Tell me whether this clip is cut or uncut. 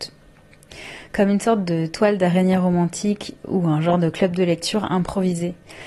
uncut